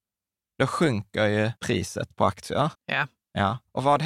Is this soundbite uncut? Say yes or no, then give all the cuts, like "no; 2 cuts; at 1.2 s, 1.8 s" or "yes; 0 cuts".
no; 2 cuts; at 1.6 s, 2.7 s